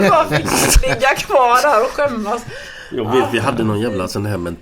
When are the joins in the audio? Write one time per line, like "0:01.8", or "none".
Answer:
none